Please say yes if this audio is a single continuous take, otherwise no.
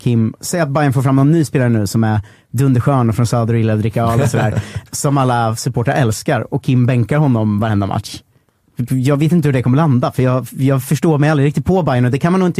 no